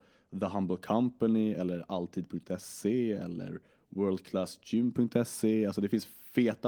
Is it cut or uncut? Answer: uncut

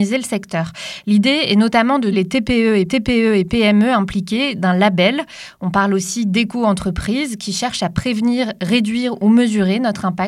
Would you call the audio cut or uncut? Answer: cut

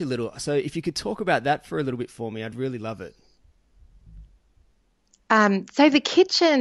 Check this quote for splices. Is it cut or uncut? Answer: uncut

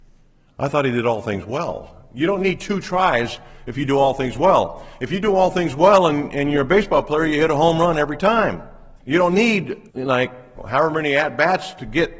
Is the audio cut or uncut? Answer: cut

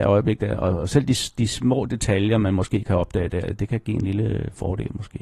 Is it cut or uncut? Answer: uncut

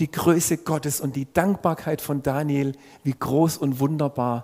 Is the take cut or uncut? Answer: uncut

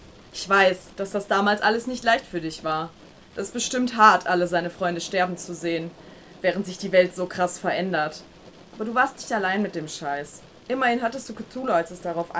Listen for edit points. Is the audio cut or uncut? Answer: uncut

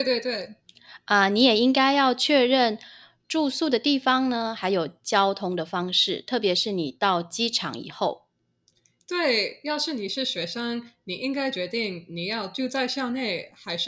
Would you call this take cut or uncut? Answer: uncut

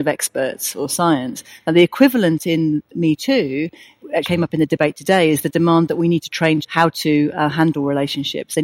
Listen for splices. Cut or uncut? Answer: cut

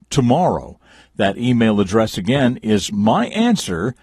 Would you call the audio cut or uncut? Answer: uncut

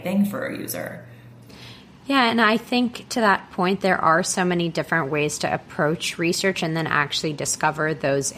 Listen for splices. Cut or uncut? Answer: uncut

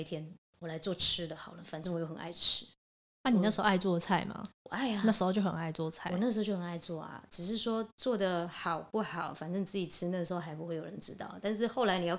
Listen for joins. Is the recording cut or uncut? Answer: uncut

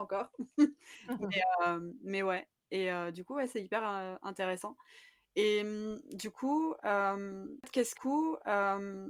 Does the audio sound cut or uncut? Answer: cut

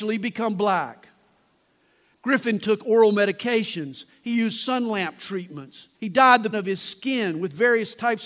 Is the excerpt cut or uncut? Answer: cut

